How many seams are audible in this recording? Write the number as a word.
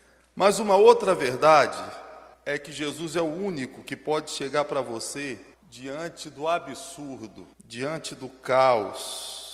three